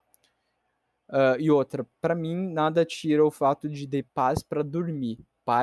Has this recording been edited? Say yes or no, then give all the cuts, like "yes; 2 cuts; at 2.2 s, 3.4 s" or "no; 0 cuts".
yes; 1 cut; at 4.1 s